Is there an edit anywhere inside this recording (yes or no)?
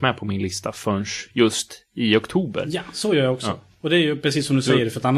no